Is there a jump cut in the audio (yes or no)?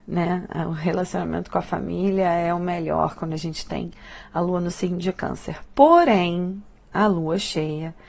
no